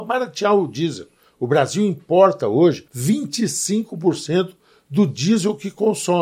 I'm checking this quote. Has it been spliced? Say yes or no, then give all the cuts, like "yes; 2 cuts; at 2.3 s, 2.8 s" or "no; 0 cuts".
yes; 1 cut; at 2.9 s